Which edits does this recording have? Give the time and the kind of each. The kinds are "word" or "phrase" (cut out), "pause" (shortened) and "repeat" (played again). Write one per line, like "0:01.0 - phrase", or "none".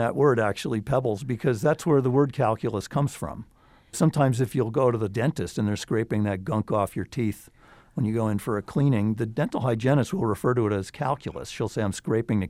none